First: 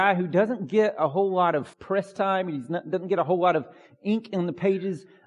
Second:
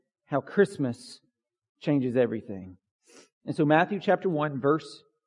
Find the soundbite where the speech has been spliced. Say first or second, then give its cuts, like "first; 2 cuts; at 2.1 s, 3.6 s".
first; 1 cut; at 1.7 s